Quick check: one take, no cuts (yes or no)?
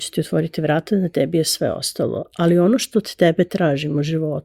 yes